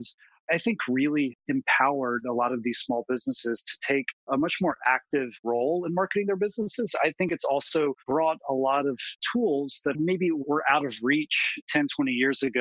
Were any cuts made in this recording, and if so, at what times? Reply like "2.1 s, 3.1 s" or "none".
8.0 s